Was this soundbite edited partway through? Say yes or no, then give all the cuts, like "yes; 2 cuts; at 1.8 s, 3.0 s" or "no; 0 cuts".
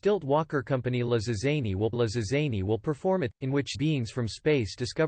yes; 3 cuts; at 1.9 s, 3.3 s, 3.7 s